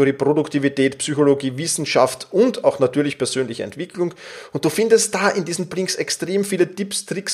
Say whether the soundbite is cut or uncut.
uncut